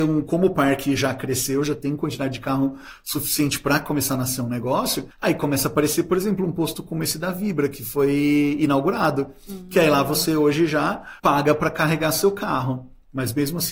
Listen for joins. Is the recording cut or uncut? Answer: cut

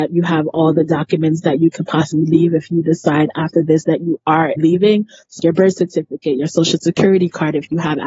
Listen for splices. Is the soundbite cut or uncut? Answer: cut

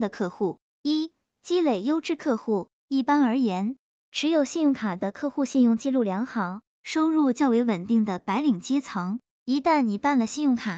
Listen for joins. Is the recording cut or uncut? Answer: uncut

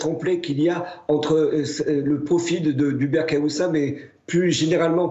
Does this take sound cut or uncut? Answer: uncut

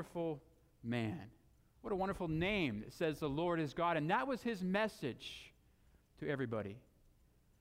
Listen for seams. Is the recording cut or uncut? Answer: uncut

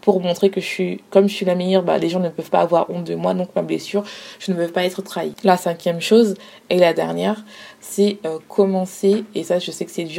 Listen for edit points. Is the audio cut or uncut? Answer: uncut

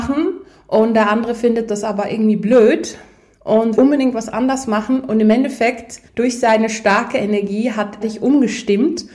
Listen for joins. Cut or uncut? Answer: cut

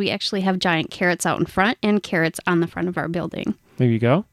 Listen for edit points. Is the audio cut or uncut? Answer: uncut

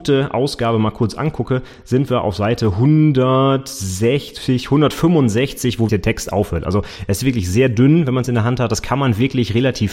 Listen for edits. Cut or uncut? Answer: cut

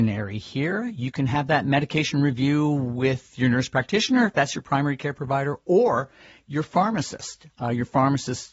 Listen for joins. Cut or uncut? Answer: uncut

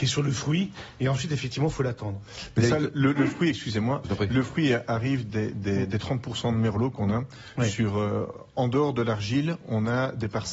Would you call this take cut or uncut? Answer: uncut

